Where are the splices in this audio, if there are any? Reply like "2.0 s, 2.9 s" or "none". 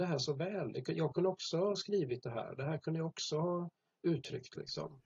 none